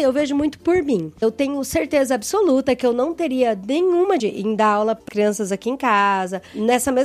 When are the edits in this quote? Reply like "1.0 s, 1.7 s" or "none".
4.2 s, 5.1 s